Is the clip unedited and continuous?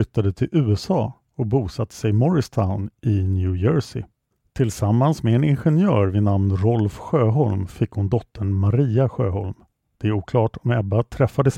yes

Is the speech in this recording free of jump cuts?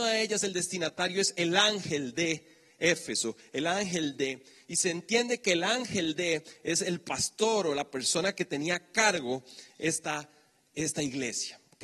yes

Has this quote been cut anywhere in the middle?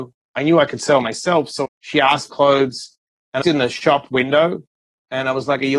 yes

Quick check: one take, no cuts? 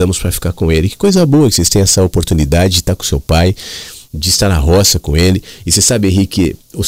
yes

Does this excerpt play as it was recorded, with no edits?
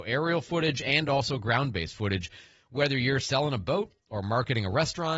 yes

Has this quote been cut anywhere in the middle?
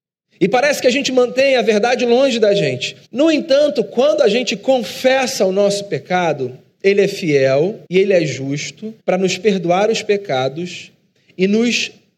yes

